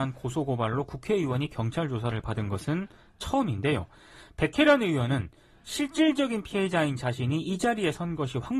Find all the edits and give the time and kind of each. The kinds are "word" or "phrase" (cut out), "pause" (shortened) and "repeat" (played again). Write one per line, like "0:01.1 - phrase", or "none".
none